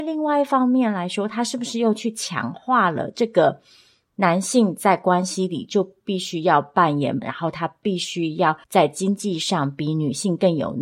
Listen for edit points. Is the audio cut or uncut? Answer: cut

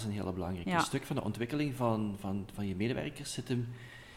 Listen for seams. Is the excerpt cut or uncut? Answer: uncut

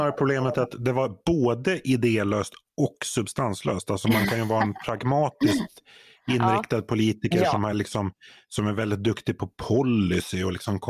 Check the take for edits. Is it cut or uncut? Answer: uncut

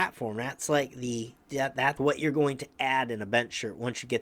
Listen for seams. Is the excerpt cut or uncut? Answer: cut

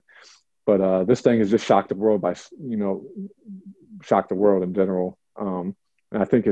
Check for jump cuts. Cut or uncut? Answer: uncut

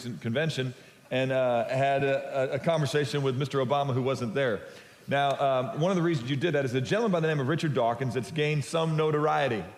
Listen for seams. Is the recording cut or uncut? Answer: uncut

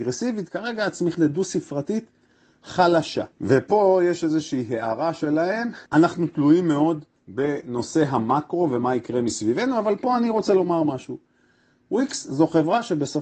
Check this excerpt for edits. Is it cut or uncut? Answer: cut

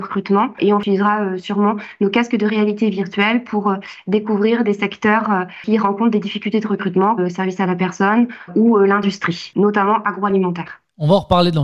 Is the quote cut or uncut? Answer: cut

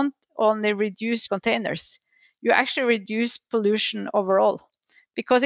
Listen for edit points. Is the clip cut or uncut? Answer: cut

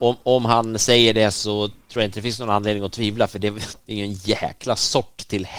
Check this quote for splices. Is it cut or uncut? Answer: uncut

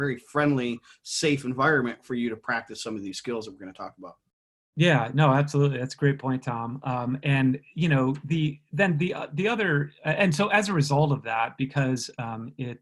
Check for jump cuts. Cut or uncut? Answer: uncut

